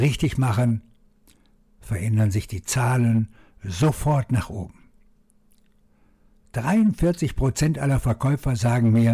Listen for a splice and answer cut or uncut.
uncut